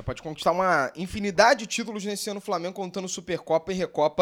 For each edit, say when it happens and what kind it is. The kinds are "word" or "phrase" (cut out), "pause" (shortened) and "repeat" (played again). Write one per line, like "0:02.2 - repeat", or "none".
none